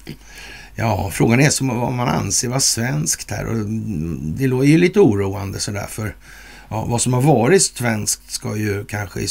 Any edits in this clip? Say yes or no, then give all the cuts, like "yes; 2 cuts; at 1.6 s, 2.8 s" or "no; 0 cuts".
no; 0 cuts